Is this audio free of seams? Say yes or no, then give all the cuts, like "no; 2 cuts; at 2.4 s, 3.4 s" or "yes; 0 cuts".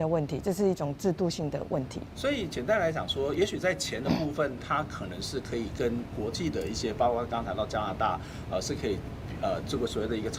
yes; 0 cuts